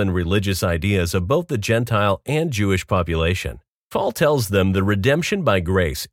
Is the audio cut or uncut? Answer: cut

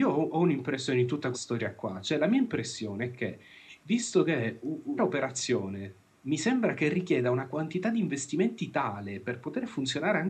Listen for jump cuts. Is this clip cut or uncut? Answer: cut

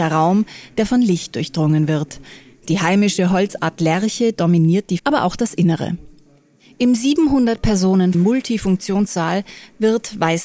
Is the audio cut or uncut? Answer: cut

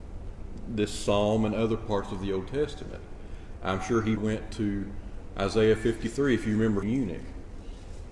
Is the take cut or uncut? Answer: cut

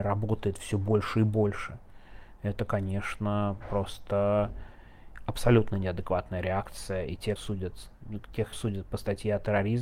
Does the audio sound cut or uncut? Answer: cut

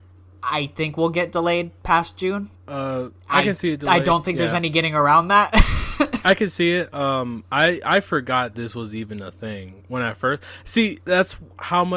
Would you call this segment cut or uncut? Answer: uncut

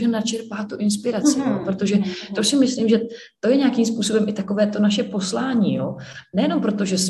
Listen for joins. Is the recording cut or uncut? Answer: uncut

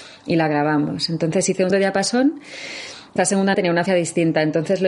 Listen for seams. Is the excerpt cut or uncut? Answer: cut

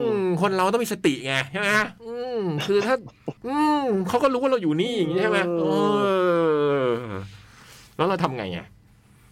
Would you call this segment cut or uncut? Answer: cut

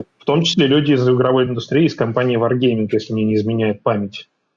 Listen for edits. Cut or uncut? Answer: uncut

